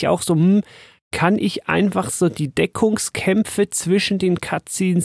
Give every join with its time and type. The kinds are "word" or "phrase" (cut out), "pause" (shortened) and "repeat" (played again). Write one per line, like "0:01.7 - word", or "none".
none

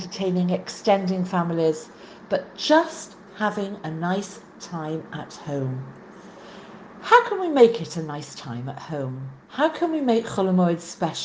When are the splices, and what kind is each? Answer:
0:09.4 - pause

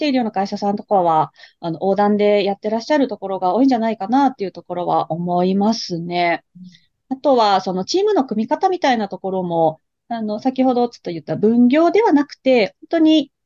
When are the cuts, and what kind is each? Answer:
none

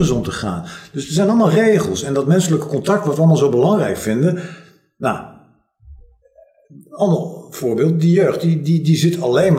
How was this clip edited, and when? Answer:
none

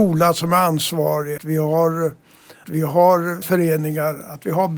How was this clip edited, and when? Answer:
0:01.4 - word
0:02.6 - word
0:03.4 - word

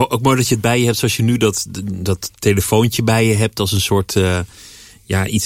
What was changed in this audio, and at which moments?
0:02.3 - pause

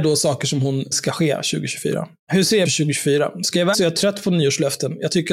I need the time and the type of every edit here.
0:00.9 - word
0:02.2 - pause
0:02.7 - phrase
0:03.7 - word

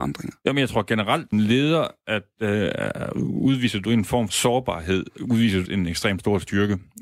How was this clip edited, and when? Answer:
0:01.3 - word
0:04.3 - word
0:05.2 - word
0:05.7 - word

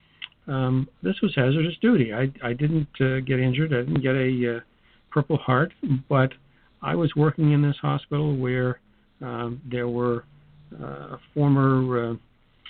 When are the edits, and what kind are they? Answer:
0:00.9 - pause

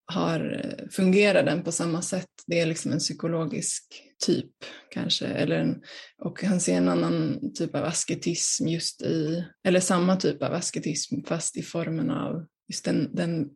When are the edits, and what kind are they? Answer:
0:09.5 - pause

